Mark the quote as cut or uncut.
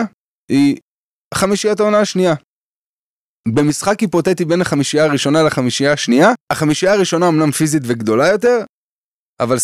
cut